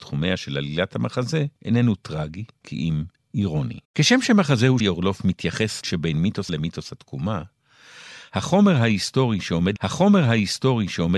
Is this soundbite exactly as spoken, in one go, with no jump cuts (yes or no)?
no